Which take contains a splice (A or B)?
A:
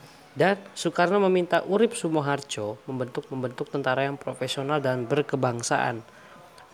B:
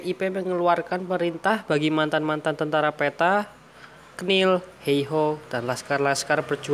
A